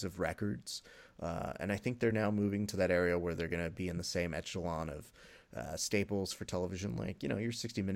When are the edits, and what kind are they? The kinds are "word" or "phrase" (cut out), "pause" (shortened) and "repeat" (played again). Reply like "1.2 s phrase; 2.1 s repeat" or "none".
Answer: none